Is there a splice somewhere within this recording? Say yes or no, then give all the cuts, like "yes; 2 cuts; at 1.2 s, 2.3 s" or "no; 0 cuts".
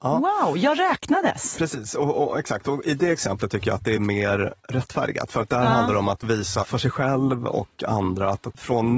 yes; 1 cut; at 4.6 s